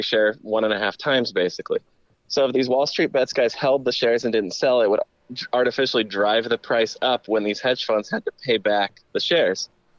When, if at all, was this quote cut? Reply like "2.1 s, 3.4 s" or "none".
none